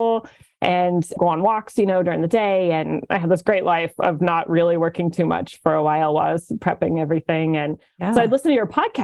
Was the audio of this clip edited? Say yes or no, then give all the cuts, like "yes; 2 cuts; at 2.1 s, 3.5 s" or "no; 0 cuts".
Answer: yes; 1 cut; at 1.2 s